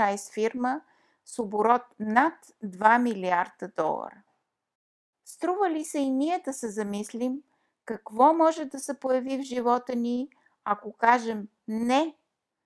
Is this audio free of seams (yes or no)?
yes